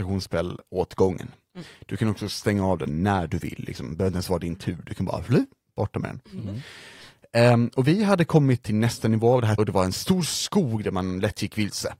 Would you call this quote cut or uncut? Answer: cut